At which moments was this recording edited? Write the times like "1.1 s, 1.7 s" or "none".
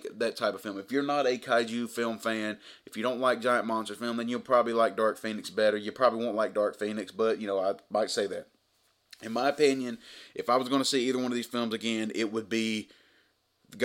none